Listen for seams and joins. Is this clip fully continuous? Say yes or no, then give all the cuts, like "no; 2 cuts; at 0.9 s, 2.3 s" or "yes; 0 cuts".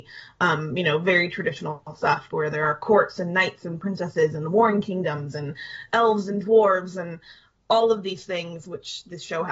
yes; 0 cuts